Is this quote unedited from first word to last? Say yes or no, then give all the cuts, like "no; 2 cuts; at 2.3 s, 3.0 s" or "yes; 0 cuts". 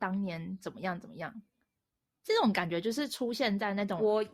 yes; 0 cuts